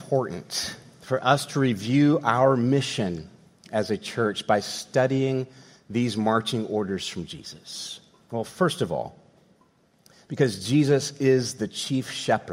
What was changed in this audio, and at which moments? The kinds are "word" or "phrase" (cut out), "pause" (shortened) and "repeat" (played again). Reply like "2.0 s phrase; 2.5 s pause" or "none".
none